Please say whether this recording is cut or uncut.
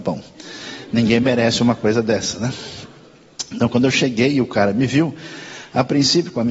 uncut